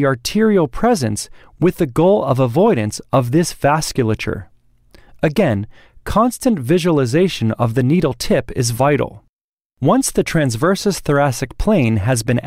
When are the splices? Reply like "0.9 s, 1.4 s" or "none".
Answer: 9.5 s